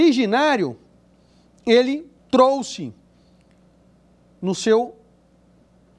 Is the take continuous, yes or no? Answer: no